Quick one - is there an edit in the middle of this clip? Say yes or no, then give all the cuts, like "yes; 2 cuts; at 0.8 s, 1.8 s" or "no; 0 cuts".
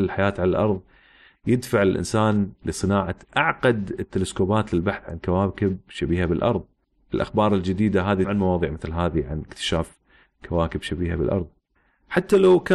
yes; 1 cut; at 8.2 s